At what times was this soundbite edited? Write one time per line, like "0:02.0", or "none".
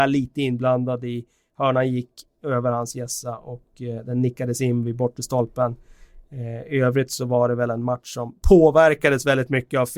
none